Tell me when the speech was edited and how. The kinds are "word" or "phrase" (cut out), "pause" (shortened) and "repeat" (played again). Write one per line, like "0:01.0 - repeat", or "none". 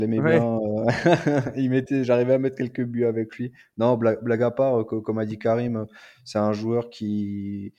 none